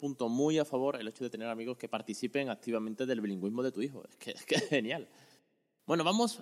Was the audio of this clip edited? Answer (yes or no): no